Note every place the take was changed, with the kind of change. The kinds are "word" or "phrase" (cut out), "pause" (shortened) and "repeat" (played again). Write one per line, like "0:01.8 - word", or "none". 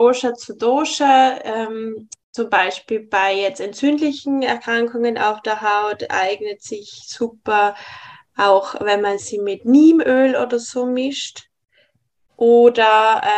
none

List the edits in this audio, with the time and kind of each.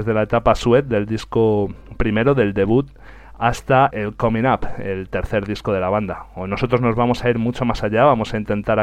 0:03.9 - word

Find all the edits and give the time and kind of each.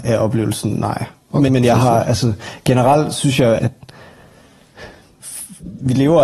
0:01.5 - word
0:03.6 - word

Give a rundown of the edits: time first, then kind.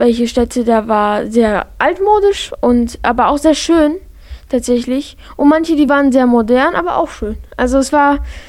none

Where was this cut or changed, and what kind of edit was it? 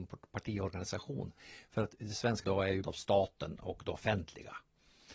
0:02.4 - word
0:02.8 - word

